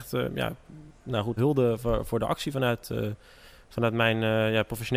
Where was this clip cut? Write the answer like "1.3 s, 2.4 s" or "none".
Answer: 1.4 s, 2.1 s